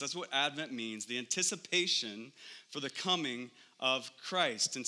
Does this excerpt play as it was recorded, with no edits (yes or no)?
yes